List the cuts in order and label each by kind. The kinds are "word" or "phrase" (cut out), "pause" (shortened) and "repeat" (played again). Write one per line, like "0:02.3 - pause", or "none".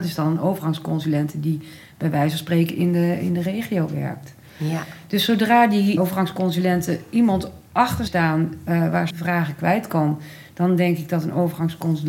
0:06.0 - word
0:08.1 - phrase
0:09.1 - phrase